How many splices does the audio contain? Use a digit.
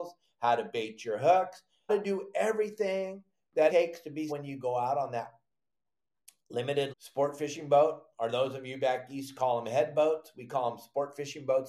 4